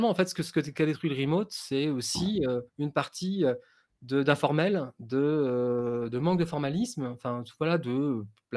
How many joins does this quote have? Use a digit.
1